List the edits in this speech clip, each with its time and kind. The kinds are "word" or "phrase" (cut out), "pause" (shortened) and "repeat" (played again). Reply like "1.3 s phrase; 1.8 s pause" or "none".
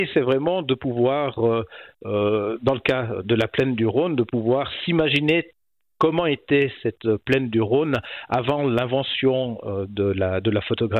3.2 s word

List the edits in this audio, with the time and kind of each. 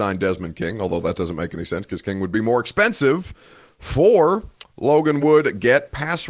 none

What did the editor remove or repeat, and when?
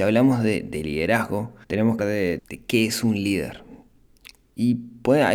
1.6 s pause; 2.0 s word; 2.4 s word

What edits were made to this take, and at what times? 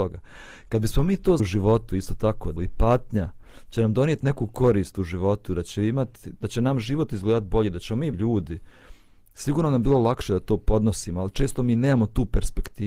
1.4 s word; 2.6 s word; 8.1 s phrase

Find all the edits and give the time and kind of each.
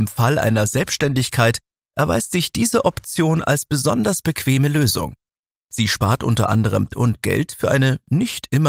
6.9 s word

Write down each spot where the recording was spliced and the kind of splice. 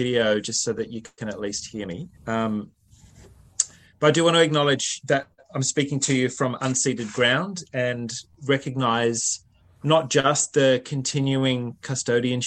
2.1 s pause

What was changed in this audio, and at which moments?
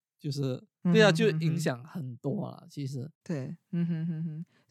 3.1 s pause

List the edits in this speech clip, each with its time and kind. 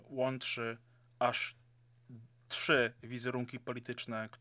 none

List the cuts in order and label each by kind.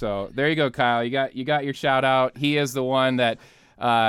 none

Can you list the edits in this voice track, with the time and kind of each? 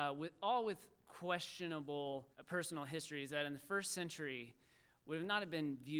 2.3 s pause

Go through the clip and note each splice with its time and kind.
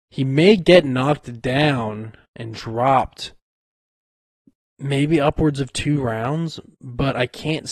none

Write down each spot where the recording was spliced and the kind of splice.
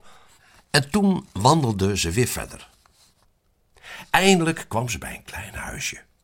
none

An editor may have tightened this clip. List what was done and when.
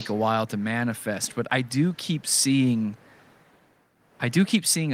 1.5 s word

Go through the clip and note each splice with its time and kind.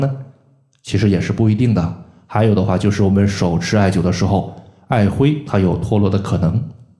none

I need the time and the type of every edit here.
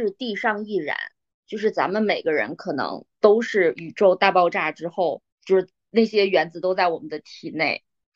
5.3 s pause

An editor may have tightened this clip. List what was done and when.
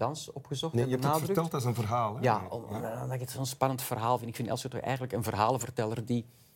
none

